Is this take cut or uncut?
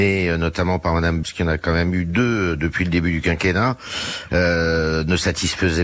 cut